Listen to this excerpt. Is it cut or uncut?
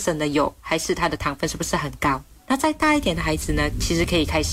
uncut